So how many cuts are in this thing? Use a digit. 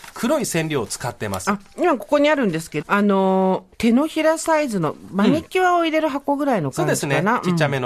2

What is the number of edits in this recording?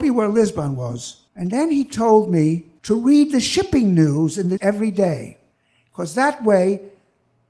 4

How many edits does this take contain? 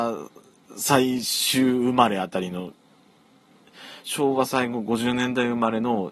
0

